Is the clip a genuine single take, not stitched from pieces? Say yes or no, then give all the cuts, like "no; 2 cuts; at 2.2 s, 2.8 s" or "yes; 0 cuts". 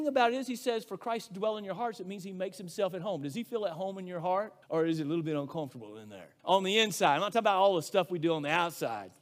no; 2 cuts; at 4.6 s, 6.4 s